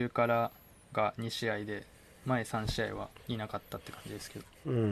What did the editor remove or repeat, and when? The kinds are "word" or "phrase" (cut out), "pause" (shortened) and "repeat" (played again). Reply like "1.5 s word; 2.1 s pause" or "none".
3.2 s pause